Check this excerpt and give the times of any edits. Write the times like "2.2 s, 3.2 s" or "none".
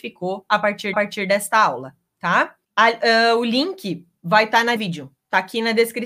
0.9 s, 2.6 s, 4.8 s